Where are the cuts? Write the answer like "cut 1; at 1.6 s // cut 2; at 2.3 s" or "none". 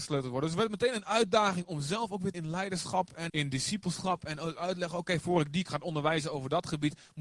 cut 1; at 2.3 s // cut 2; at 3.3 s